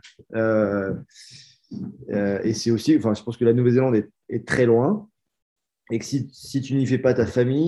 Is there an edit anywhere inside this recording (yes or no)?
no